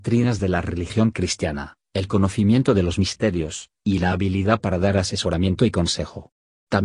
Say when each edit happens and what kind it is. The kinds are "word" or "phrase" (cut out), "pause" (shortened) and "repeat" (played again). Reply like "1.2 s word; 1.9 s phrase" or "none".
none

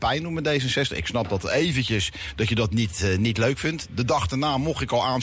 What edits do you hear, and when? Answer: none

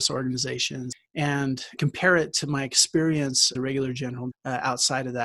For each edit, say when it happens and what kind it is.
1.8 s word; 3.5 s word; 4.3 s word

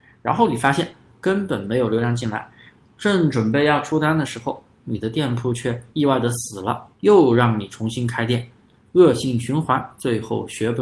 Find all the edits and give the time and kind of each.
5.9 s pause; 6.9 s pause

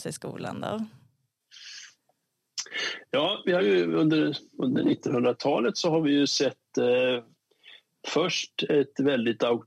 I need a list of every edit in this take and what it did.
3.6 s phrase

